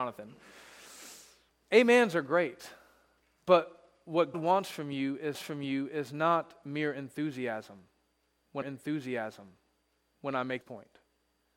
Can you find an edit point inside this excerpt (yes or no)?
yes